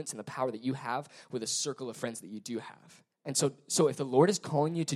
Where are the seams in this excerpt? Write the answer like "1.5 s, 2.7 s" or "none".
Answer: 3.1 s